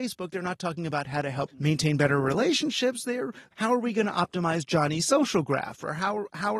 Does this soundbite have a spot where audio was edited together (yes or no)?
yes